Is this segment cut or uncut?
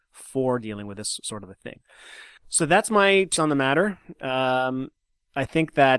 cut